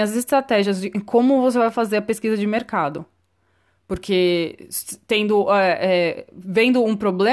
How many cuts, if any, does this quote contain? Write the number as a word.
zero